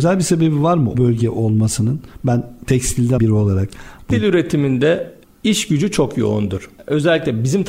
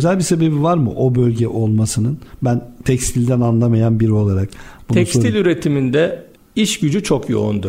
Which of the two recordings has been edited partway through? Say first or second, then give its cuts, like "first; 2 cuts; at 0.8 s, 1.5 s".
first; 3 cuts; at 0.9 s, 3.2 s, 4.1 s